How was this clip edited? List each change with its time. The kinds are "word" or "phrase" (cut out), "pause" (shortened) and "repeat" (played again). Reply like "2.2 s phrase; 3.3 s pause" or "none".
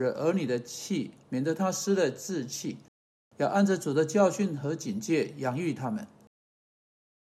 none

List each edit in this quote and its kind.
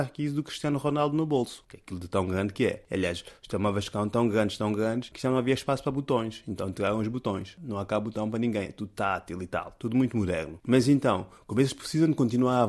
none

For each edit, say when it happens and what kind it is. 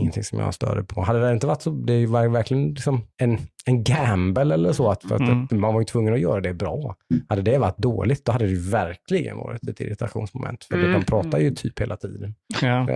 3.1 s pause

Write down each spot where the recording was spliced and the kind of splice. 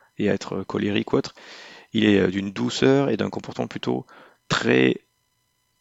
none

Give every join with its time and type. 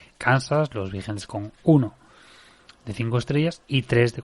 1.3 s word

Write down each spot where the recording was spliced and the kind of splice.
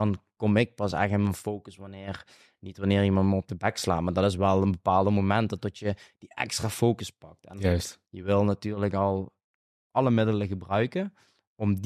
none

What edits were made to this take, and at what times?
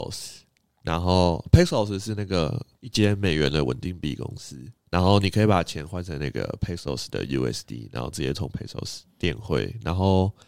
2.7 s pause

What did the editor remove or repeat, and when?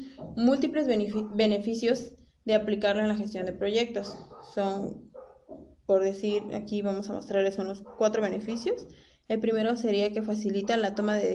none

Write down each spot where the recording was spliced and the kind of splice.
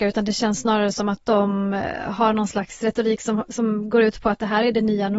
none

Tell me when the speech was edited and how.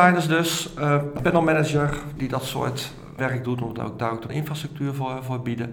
2.2 s word; 3.2 s word; 4.3 s word

